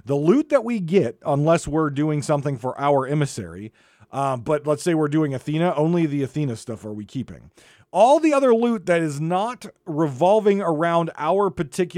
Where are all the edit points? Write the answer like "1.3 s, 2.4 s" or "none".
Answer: none